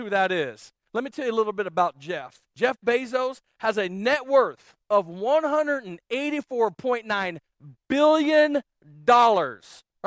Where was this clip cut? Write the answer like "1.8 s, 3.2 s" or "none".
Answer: 2.5 s, 4.8 s